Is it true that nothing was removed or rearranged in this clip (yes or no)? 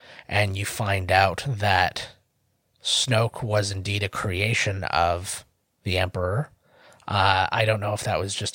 yes